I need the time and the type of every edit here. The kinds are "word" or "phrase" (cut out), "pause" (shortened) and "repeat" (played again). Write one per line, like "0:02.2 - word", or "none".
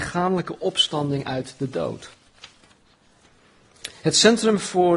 none